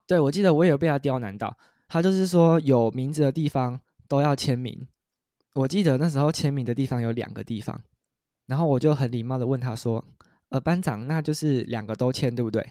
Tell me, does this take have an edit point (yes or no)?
no